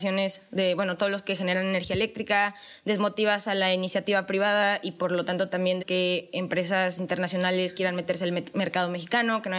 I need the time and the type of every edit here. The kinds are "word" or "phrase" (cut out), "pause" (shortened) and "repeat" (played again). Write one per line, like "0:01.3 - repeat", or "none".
0:05.8 - word